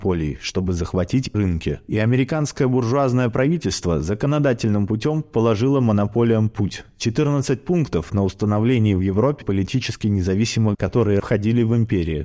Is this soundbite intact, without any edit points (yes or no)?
no